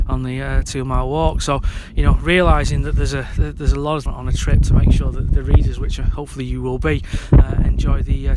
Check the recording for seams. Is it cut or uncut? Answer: cut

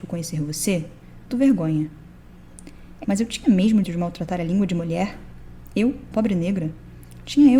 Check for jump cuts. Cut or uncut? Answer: cut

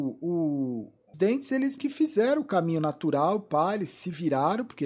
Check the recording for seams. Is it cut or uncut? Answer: cut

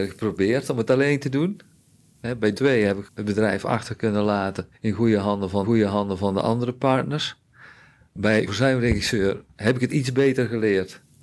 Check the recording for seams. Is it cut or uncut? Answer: cut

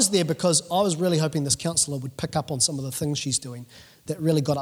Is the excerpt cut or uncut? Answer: uncut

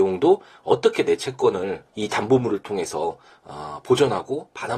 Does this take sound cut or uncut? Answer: cut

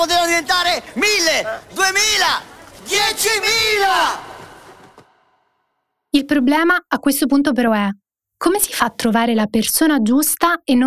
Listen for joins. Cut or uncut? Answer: uncut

